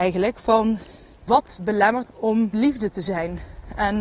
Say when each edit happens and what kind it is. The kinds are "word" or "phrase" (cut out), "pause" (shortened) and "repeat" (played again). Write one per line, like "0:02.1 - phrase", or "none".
0:01.3 - word
0:02.1 - word
0:02.5 - word